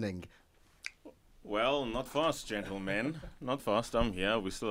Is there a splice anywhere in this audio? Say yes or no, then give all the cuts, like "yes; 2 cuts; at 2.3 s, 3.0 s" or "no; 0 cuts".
yes; 2 cuts; at 2.1 s, 3.6 s